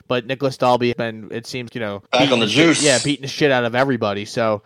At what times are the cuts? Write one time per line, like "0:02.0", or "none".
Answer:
0:00.9
0:01.7
0:02.1